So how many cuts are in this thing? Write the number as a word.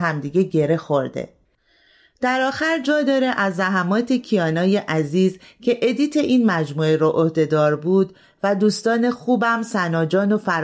zero